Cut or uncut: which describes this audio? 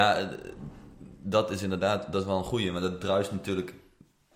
uncut